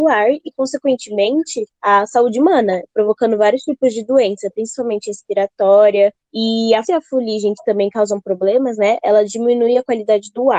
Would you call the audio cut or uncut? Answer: cut